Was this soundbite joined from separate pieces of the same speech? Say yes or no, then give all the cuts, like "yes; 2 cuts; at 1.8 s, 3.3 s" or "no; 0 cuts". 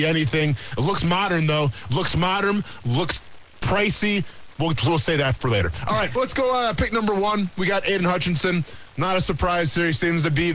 yes; 2 cuts; at 5.4 s, 6.2 s